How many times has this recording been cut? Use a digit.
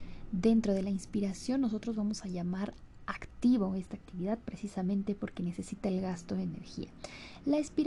0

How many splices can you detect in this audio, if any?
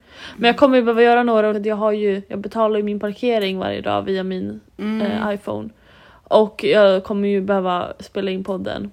1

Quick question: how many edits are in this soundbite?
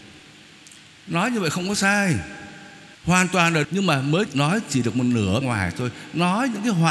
4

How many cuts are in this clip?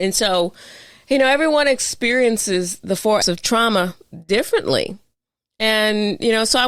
1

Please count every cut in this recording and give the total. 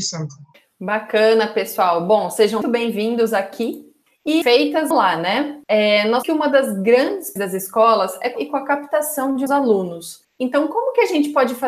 7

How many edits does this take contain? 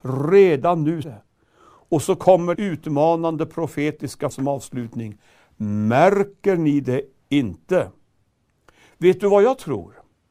3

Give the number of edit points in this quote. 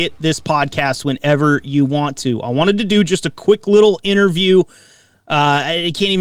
0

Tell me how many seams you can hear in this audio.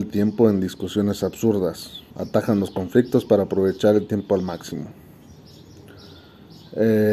1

